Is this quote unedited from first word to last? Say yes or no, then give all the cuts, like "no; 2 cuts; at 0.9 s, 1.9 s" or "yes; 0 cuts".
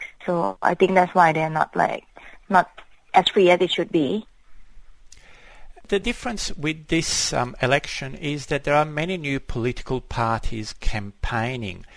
yes; 0 cuts